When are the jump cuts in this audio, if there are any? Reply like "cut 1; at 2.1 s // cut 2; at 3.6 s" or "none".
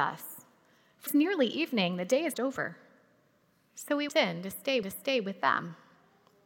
cut 1; at 1.1 s // cut 2; at 2.3 s // cut 3; at 4.1 s // cut 4; at 4.8 s